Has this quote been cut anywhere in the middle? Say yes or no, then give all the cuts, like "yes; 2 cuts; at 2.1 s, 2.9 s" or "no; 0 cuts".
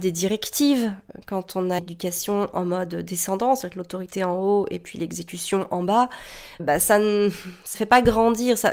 yes; 3 cuts; at 1.8 s, 6.6 s, 7.7 s